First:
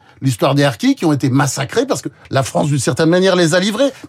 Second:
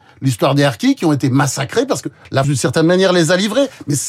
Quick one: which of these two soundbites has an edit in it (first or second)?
second